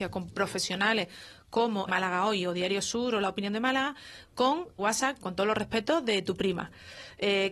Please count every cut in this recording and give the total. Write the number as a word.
two